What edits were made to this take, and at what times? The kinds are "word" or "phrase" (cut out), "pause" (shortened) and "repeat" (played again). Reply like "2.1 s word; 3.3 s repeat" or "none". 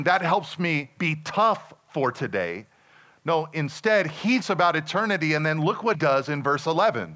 4.4 s word; 5.9 s word